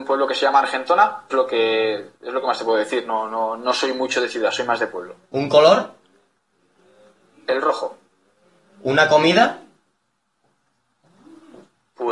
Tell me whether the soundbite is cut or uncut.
cut